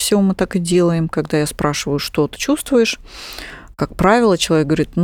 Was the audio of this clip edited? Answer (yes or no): yes